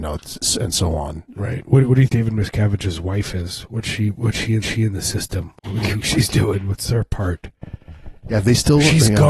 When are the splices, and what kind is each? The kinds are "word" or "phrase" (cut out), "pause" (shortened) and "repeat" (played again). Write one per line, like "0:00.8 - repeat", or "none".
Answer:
0:02.1 - word
0:04.6 - repeat
0:05.6 - pause